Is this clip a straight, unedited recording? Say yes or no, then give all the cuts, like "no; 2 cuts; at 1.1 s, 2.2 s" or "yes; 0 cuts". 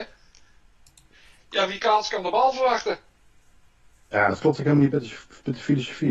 yes; 0 cuts